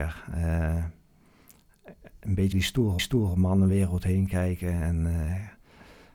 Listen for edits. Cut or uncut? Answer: cut